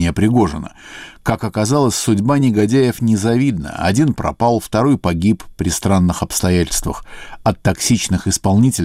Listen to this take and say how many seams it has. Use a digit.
0